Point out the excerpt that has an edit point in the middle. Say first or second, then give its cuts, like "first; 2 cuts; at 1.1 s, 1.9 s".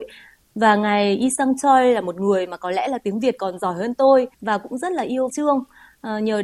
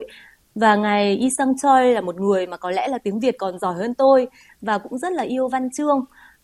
first; 2 cuts; at 4.3 s, 5.3 s